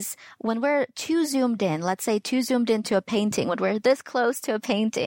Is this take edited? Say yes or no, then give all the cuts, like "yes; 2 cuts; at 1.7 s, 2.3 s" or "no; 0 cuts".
no; 0 cuts